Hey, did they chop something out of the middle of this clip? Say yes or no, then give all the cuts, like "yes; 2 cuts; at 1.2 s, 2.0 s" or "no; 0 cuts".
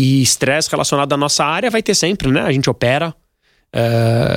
no; 0 cuts